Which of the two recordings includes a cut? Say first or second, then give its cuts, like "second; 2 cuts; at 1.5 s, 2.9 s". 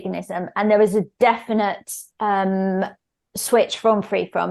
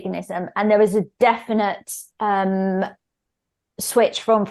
first; 1 cut; at 3.2 s